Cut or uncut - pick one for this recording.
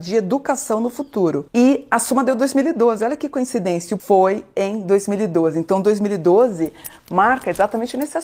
cut